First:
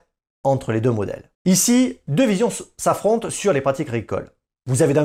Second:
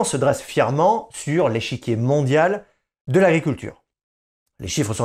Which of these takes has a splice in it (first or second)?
first